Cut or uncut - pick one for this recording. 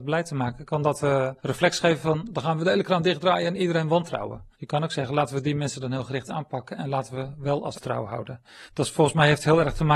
cut